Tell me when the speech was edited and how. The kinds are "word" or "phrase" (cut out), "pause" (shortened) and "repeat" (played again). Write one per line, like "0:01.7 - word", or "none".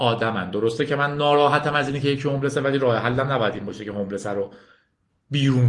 none